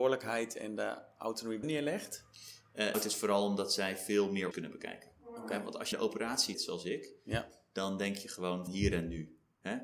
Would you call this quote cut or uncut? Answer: cut